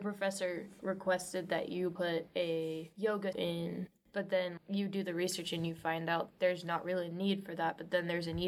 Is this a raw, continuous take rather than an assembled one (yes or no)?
no